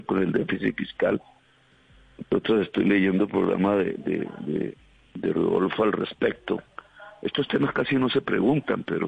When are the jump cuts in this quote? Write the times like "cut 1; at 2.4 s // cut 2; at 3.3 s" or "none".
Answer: none